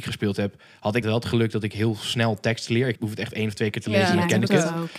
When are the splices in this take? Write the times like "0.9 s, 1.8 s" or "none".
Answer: 1.0 s, 3.0 s